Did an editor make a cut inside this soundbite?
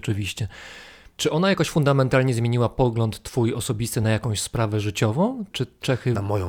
no; 0 cuts

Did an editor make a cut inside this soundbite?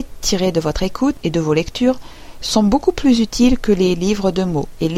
no; 0 cuts

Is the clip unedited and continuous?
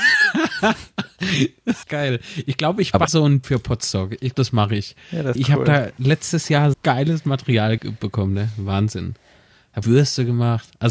no; 8 cuts; at 1.8 s, 3.1 s, 3.4 s, 4.3 s, 5.4 s, 6.7 s, 7.8 s, 9.8 s

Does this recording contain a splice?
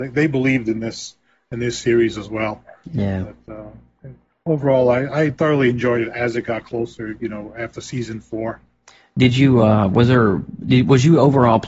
no; 0 cuts

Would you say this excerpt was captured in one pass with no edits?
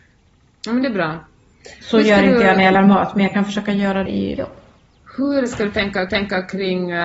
no; 4 cuts; at 2.7 s, 4.1 s, 4.4 s, 6.1 s

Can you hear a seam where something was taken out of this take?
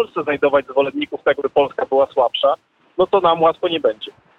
yes; 1 cut; at 1.4 s

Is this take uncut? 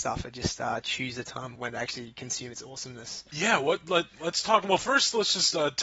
no; 1 cut; at 1.6 s

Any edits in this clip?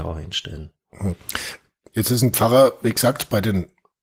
no; 0 cuts

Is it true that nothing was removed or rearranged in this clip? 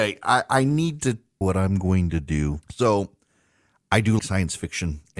no; 3 cuts; at 1.4 s, 2.6 s, 4.2 s

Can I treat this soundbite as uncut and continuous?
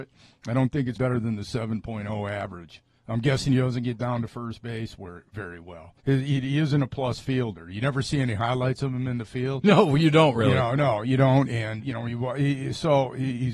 no; 4 cuts; at 1.0 s, 3.0 s, 6.0 s, 11.8 s

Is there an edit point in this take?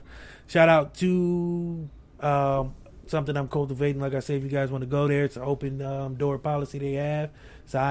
yes; 1 cut; at 2.2 s

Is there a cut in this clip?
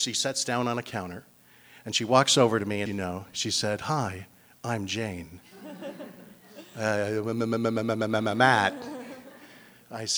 yes; 1 cut; at 2.9 s

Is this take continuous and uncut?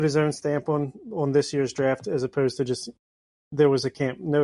yes; 0 cuts

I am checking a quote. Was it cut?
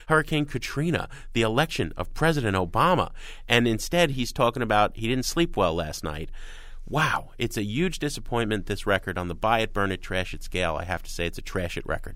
no; 0 cuts

